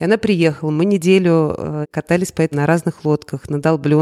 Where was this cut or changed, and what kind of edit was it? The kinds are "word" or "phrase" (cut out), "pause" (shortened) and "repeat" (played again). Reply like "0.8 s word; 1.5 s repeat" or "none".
1.8 s word; 2.5 s word